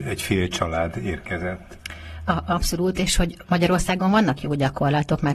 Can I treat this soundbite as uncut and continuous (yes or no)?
no